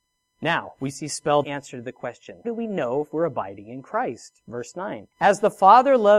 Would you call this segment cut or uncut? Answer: cut